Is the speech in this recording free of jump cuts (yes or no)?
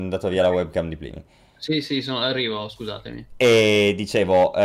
yes